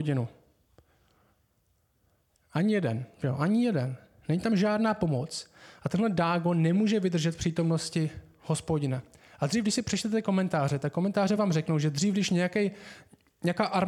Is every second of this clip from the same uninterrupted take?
yes; 0 cuts

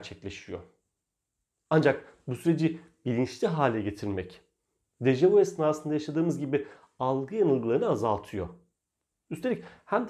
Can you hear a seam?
no; 0 cuts

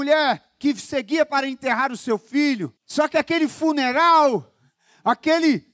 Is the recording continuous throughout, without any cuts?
no; 1 cut; at 2.8 s

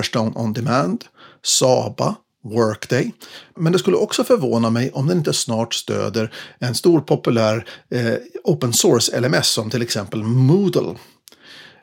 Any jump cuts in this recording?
no; 0 cuts

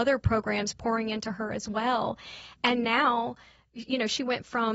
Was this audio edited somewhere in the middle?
no; 0 cuts

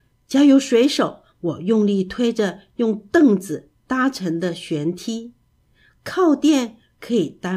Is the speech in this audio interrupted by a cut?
no; 0 cuts

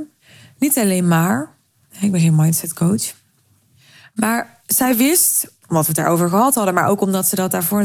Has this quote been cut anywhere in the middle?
no; 0 cuts

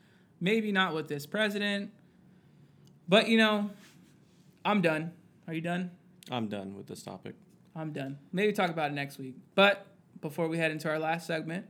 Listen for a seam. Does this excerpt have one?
no; 0 cuts

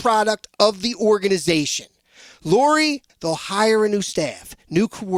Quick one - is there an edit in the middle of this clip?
yes; 1 cut; at 3.1 s

